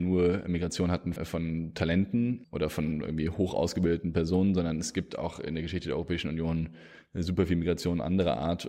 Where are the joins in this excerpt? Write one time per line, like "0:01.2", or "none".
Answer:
0:01.2
0:02.4